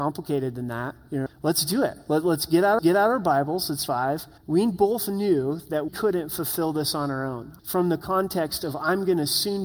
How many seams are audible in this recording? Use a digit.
6